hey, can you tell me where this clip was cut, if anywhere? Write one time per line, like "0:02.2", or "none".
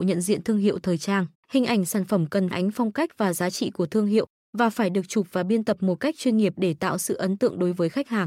0:01.4
0:02.5